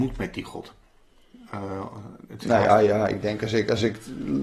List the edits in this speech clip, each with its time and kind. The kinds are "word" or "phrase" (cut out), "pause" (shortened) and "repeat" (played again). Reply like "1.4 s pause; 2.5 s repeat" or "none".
none